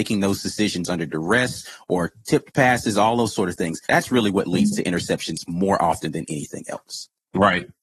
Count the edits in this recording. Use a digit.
1